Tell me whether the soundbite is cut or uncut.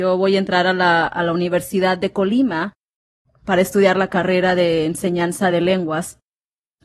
uncut